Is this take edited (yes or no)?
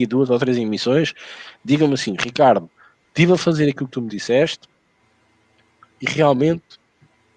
no